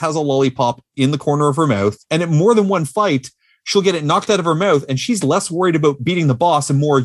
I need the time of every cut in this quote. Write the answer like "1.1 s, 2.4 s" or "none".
2.0 s